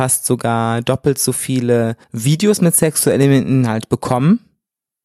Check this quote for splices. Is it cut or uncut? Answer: cut